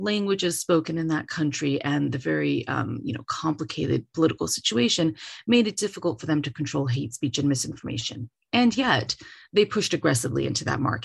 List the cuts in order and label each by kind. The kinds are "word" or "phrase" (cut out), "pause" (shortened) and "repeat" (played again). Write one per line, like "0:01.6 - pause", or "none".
none

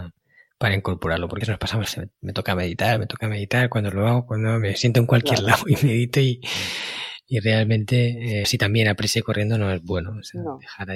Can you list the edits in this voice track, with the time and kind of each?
0:01.4 - phrase
0:01.8 - phrase
0:08.4 - phrase

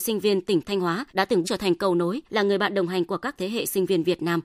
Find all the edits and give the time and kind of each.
0:01.1 - pause
0:01.4 - word
0:02.3 - pause

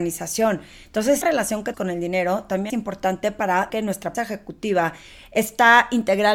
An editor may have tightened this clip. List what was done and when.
0:01.2 - word
0:01.7 - word
0:02.7 - word
0:03.7 - word
0:04.1 - word

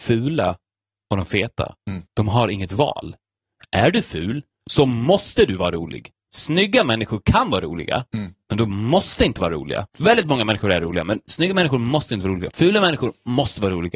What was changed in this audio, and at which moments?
0:02.1 - pause
0:09.9 - pause

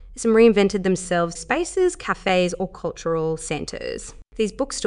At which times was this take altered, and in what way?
0:01.4 - phrase

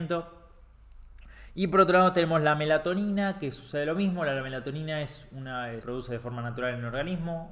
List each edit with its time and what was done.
0:05.8 - word

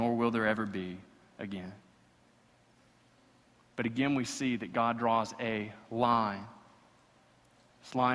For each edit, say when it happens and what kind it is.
none

